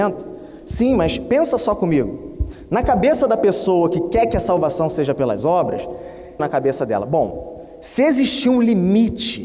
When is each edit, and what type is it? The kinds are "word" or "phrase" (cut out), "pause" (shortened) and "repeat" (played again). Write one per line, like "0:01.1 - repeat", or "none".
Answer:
0:06.4 - phrase